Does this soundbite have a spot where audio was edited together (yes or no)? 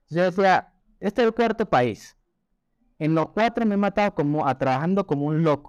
no